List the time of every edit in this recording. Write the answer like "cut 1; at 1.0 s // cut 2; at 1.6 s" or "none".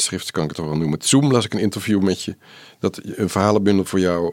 none